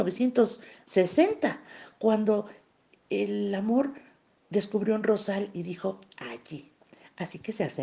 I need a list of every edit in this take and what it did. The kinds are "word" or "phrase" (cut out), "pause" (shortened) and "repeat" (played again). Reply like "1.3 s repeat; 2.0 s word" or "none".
none